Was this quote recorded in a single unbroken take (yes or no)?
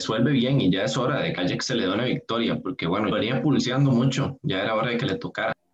no